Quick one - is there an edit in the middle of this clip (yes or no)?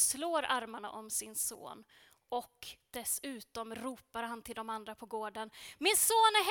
no